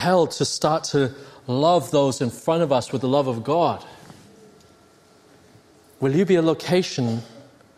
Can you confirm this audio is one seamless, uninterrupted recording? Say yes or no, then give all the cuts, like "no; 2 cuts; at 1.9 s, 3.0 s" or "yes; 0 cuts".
yes; 0 cuts